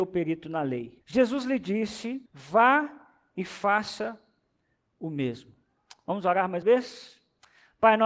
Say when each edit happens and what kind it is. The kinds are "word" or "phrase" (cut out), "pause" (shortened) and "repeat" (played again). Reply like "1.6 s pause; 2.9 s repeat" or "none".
1.0 s pause; 2.3 s pause; 6.6 s word